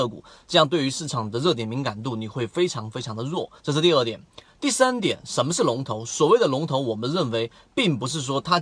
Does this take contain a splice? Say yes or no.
yes